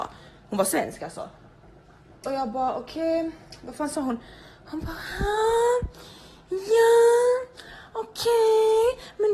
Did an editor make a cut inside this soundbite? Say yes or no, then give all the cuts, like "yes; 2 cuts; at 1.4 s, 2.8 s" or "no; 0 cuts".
no; 0 cuts